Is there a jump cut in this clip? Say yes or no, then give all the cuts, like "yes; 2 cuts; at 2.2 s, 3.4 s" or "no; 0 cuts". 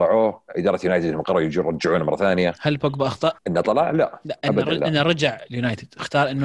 yes; 1 cut; at 3.4 s